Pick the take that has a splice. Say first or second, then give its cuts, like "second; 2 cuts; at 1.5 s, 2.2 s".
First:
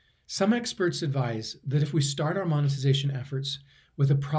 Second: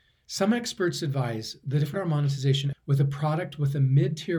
second; 2 cuts; at 1.9 s, 2.7 s